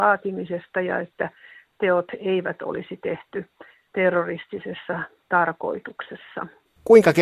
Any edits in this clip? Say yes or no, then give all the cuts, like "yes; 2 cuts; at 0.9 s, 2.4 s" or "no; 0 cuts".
no; 0 cuts